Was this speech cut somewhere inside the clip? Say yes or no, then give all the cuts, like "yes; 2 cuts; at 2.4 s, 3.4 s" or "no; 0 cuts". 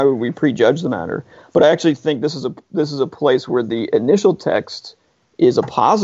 no; 0 cuts